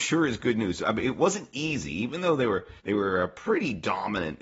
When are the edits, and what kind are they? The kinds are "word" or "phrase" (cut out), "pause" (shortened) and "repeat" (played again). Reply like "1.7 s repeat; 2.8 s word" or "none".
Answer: 2.8 s pause